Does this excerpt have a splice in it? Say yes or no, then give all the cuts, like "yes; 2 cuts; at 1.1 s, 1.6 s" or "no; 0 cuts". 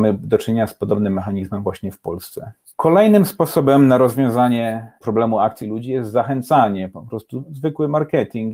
yes; 1 cut; at 5.6 s